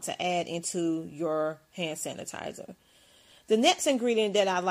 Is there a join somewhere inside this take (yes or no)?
no